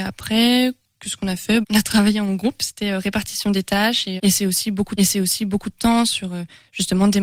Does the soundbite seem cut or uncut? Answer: cut